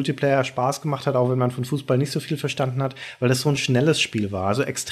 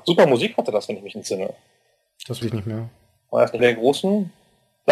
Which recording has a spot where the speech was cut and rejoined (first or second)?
second